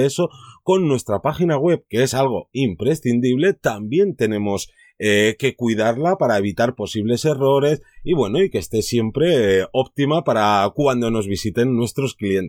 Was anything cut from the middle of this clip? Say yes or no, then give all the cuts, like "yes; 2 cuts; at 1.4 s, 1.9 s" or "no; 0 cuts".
no; 0 cuts